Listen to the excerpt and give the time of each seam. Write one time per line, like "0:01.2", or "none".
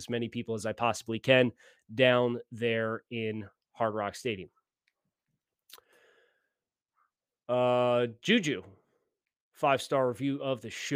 none